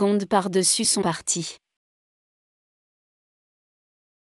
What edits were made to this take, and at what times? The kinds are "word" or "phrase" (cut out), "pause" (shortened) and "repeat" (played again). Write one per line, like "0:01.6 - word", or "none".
0:01.0 - phrase